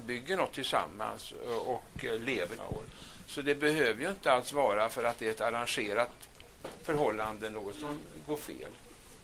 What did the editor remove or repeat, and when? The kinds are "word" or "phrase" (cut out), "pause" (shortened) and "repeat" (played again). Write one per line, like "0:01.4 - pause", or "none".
0:02.6 - phrase